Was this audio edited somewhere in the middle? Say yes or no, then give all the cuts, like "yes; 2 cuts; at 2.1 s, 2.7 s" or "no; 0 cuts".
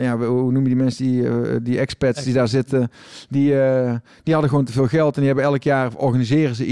no; 0 cuts